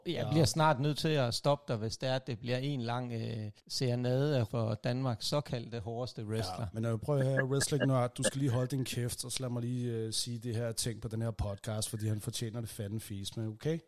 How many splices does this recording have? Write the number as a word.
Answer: two